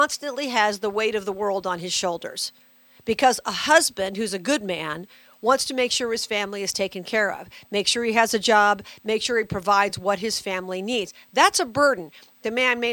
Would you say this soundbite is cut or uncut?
uncut